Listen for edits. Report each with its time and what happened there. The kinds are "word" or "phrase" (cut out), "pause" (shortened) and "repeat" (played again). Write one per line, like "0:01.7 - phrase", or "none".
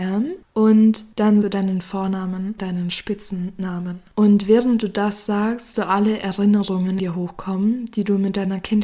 0:01.4 - word
0:02.6 - word
0:05.7 - word
0:07.0 - word